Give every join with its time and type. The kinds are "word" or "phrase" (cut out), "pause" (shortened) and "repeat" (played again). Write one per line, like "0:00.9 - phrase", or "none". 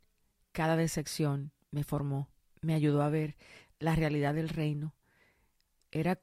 none